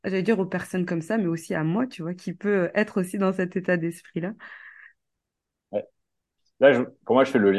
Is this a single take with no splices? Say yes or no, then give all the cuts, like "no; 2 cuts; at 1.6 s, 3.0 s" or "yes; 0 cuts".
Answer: yes; 0 cuts